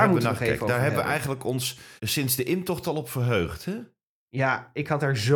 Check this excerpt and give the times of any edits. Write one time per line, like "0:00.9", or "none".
0:02.0